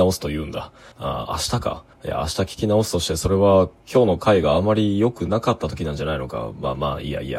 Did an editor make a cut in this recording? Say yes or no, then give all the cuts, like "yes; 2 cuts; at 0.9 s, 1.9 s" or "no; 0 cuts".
yes; 2 cuts; at 0.9 s, 1.9 s